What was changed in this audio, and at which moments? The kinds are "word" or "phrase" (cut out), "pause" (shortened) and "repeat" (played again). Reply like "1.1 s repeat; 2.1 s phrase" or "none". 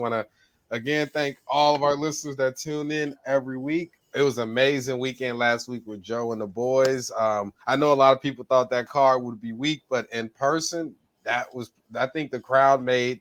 4.0 s pause; 7.6 s pause